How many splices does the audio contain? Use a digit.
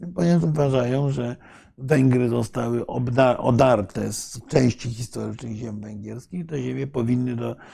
0